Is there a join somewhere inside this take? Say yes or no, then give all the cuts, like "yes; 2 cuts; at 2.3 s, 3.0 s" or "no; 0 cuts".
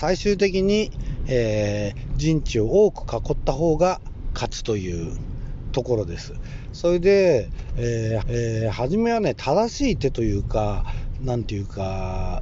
yes; 1 cut; at 8.2 s